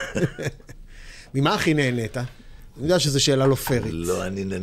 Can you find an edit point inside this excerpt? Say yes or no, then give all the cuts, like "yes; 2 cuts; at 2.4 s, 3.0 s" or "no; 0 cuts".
no; 0 cuts